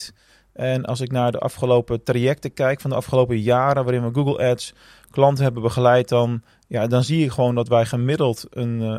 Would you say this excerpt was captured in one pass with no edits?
yes; 0 cuts

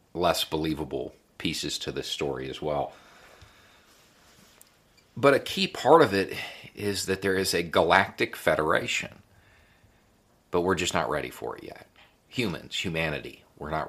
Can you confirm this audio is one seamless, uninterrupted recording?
yes; 0 cuts

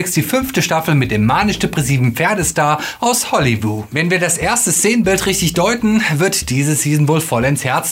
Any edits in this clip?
no; 0 cuts

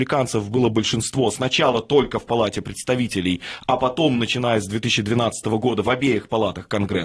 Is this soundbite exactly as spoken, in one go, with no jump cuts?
yes; 0 cuts

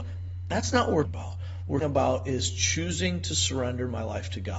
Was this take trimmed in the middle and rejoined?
yes; 2 cuts; at 1.0 s, 1.8 s

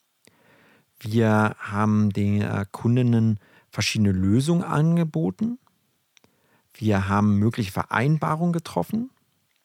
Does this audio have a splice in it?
no; 0 cuts

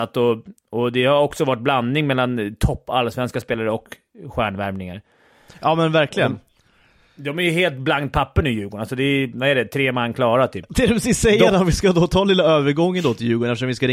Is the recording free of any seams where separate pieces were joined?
yes; 0 cuts

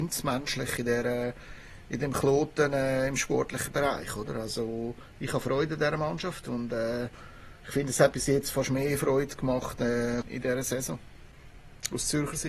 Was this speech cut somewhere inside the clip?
yes; 3 cuts; at 7.6 s, 8.1 s, 10.2 s

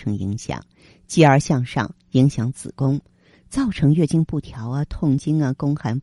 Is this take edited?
no; 0 cuts

